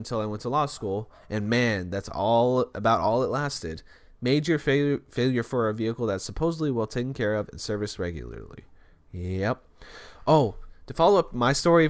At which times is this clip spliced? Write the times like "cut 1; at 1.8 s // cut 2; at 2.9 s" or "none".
none